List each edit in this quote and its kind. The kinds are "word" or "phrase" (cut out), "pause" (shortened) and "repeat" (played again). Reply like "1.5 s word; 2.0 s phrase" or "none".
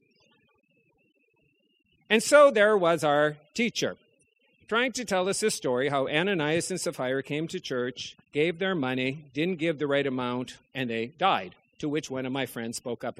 8.2 s pause; 10.7 s pause; 11.6 s pause